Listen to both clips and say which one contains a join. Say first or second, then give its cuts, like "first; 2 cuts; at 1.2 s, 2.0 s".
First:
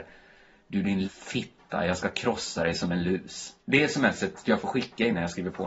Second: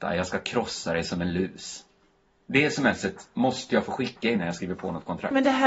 first; 3 cuts; at 1.0 s, 3.6 s, 4.4 s